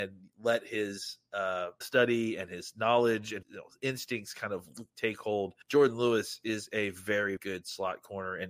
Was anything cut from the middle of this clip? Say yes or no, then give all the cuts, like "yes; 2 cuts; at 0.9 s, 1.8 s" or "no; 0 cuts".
yes; 4 cuts; at 1.8 s, 3.4 s, 5.6 s, 7.4 s